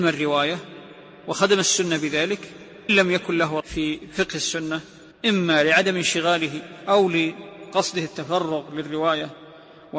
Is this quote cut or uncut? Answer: cut